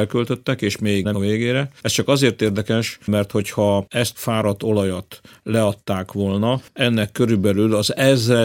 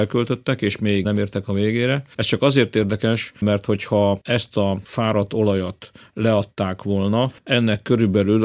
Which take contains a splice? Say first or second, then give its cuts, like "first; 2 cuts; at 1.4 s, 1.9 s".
first; 2 cuts; at 1.1 s, 4.1 s